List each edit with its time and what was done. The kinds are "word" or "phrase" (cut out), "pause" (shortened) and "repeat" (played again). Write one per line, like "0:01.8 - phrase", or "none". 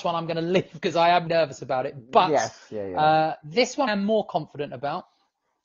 0:01.3 - word
0:03.9 - word